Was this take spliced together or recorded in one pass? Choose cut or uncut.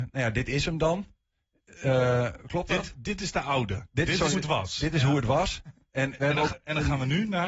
cut